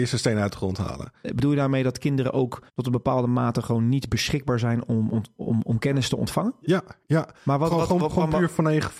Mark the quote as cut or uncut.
cut